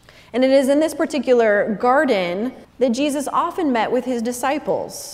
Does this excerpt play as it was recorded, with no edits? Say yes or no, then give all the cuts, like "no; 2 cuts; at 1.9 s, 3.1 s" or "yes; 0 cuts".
no; 1 cut; at 2.6 s